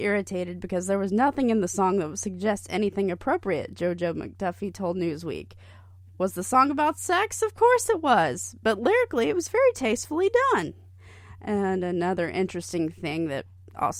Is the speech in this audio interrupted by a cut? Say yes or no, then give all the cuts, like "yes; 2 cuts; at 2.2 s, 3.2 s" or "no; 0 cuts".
no; 0 cuts